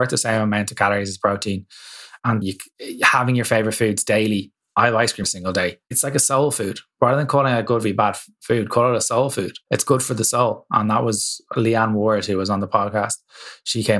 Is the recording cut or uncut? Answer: cut